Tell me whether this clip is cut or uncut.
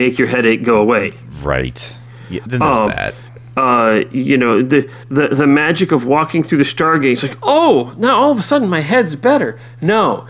uncut